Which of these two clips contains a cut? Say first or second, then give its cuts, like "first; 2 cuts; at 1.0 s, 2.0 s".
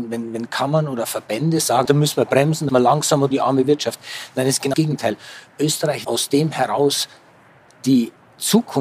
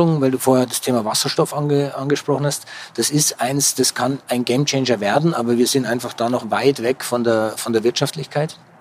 first; 5 cuts; at 1.8 s, 2.7 s, 3.3 s, 4.7 s, 6.0 s